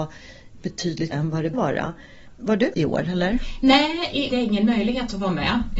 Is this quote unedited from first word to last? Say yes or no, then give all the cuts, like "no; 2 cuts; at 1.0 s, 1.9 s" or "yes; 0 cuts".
no; 4 cuts; at 1.1 s, 1.5 s, 2.7 s, 4.3 s